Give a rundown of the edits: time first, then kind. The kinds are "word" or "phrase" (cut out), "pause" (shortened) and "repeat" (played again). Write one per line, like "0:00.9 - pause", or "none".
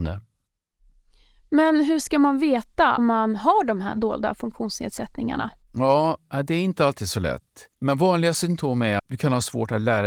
0:03.0 - word
0:07.7 - pause
0:09.0 - word